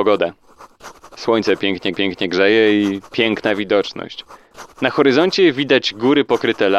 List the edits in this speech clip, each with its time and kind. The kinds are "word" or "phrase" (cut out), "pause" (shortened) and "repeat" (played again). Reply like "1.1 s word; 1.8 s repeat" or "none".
1.9 s repeat

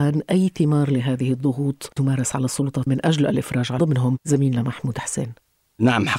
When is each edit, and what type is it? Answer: 2.0 s word; 2.9 s word; 3.8 s phrase

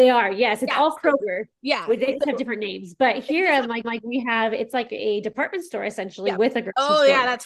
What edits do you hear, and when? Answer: 1.5 s pause; 3.8 s repeat

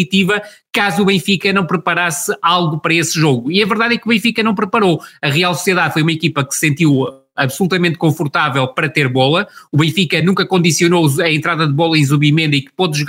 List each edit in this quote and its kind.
none

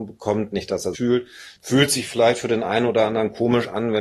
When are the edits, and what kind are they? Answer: 0.9 s phrase; 1.6 s pause

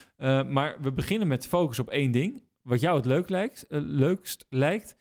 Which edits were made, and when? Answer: none

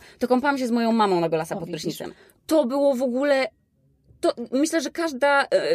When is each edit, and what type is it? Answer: none

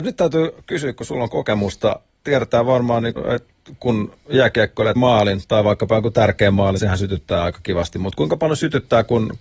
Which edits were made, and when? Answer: 2.2 s word; 3.2 s word; 5.0 s word; 6.8 s word

